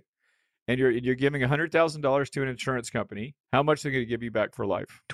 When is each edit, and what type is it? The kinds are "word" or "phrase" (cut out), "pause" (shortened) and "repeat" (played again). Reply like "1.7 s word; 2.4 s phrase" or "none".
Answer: 3.4 s pause